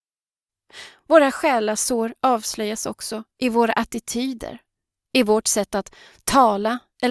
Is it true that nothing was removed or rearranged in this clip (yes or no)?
yes